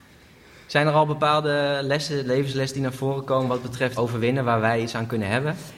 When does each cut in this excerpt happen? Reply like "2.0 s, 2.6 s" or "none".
4.0 s